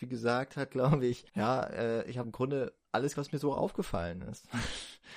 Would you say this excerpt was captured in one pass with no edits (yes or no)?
no